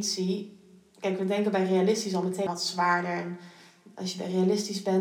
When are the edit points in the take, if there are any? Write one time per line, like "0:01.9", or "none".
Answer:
0:02.5